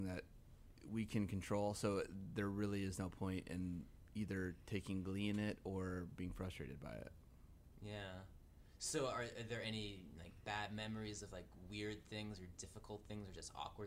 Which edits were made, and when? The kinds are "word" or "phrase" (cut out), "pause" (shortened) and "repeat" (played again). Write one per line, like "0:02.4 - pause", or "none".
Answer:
none